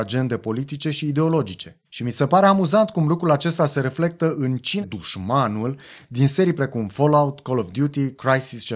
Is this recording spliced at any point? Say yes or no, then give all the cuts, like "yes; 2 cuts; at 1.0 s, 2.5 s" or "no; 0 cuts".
yes; 2 cuts; at 1.8 s, 4.8 s